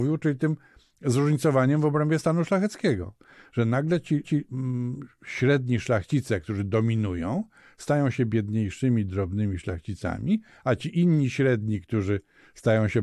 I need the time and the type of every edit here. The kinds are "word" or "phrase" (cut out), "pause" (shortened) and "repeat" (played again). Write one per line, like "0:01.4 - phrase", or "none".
0:04.2 - repeat